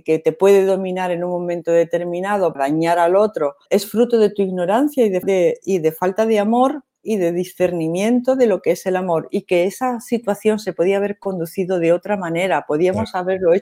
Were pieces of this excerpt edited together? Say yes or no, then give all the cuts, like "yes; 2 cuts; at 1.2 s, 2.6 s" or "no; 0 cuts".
yes; 3 cuts; at 2.5 s, 3.7 s, 5.2 s